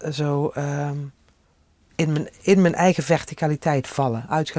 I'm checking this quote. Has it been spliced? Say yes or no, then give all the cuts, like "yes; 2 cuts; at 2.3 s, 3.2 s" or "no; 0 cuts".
no; 0 cuts